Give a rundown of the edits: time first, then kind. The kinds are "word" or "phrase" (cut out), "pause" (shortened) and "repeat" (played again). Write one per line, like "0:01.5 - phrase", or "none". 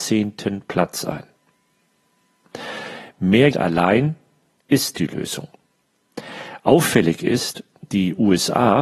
0:03.5 - word
0:04.9 - word
0:07.9 - word